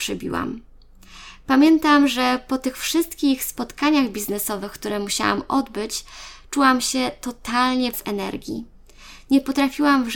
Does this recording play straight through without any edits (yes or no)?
no